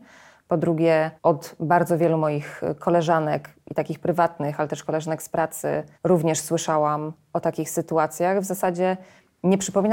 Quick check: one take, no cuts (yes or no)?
no